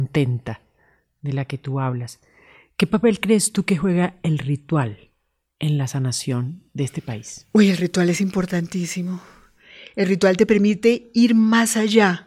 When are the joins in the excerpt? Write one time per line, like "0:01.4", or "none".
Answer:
none